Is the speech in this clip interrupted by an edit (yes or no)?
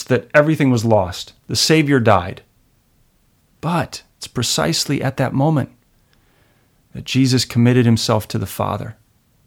no